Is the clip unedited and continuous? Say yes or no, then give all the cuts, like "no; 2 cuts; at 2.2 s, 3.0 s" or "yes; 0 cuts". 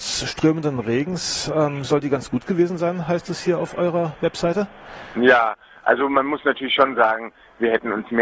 yes; 0 cuts